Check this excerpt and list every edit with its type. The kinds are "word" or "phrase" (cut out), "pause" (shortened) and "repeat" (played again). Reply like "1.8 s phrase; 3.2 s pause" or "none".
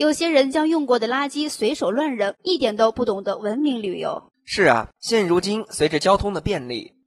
2.4 s pause; 4.3 s pause; 5.0 s pause

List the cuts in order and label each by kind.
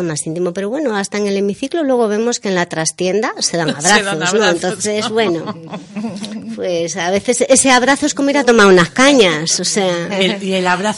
none

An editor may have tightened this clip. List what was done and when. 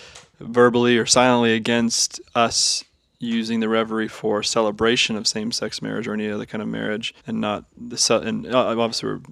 2.2 s word; 7.2 s pause; 7.7 s pause

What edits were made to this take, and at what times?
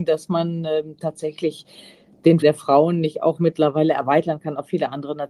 2.4 s word

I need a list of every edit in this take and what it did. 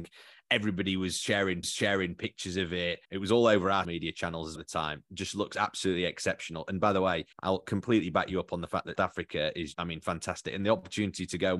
1.6 s repeat; 3.0 s pause; 3.8 s word; 4.6 s word; 7.3 s pause; 9.0 s word; 9.7 s word

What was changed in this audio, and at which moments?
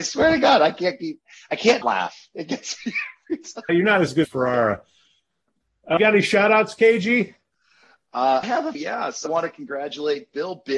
1.8 s word; 3.7 s word; 4.2 s word; 6.0 s word; 8.4 s word; 8.7 s word; 9.3 s word

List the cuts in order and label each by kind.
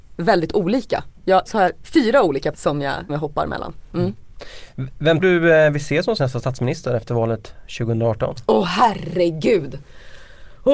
1.5 s word; 1.8 s word; 2.5 s word; 3.1 s word; 5.2 s word; 6.2 s word

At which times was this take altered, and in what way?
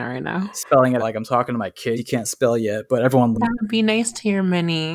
1.0 s word; 2.0 s word; 3.3 s word

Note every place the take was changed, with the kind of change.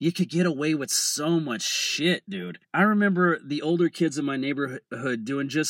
2.6 s pause

